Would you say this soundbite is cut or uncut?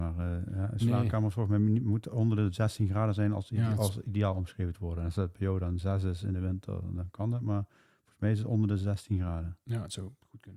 uncut